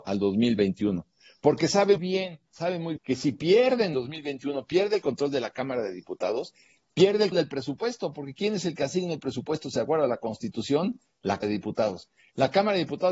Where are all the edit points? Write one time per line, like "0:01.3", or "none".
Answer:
0:02.0
0:03.0
0:03.9
0:07.3
0:11.4